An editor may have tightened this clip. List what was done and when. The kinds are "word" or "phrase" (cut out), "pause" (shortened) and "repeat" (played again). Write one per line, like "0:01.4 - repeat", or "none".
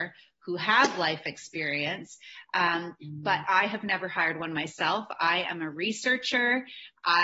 none